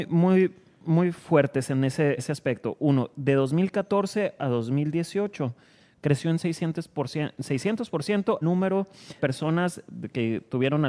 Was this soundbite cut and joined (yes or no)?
yes